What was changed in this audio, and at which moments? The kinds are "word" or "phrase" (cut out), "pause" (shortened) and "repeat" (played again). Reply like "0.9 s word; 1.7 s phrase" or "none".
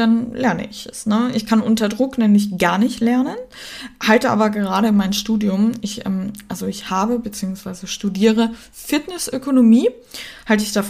none